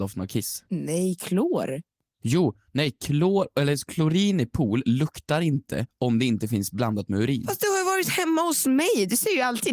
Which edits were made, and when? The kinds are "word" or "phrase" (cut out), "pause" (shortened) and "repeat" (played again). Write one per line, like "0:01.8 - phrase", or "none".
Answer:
none